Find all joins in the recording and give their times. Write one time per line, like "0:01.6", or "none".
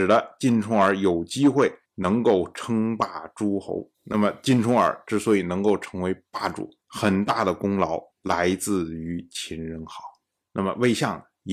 0:01.9
0:03.9
0:06.8
0:08.1
0:10.4